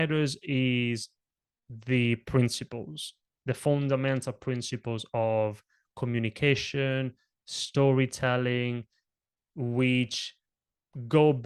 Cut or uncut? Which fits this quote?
uncut